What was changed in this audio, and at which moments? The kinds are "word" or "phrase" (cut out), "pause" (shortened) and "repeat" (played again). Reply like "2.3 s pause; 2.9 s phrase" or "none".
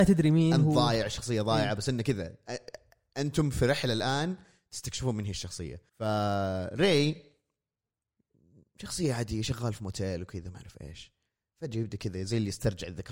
5.9 s pause